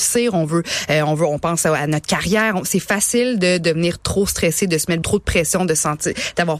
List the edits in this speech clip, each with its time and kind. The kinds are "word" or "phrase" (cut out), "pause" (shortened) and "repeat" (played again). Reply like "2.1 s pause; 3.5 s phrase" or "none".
5.0 s word